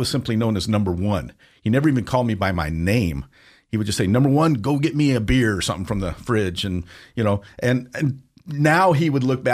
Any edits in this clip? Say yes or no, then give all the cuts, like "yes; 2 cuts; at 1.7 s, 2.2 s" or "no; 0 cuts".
no; 0 cuts